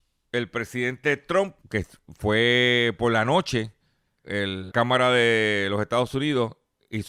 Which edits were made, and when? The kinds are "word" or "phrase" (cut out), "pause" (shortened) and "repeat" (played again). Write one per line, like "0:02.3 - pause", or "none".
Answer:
0:01.6 - pause
0:04.2 - word
0:04.7 - word